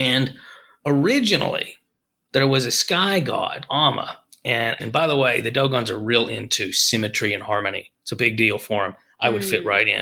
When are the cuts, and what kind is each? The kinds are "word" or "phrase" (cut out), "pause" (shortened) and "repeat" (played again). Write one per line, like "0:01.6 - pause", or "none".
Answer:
0:03.7 - word
0:04.8 - phrase